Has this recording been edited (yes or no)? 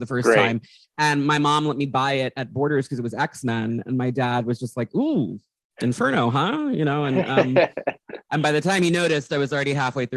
no